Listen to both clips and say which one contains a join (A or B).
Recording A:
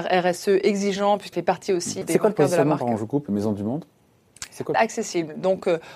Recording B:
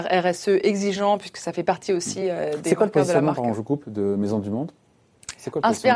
A